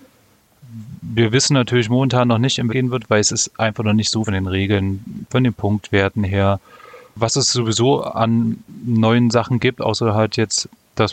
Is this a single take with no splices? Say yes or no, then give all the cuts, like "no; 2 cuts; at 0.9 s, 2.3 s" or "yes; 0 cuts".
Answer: no; 2 cuts; at 2.7 s, 4.3 s